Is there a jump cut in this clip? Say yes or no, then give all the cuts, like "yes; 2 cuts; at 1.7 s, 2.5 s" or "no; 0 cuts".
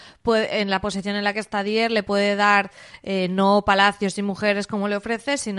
no; 0 cuts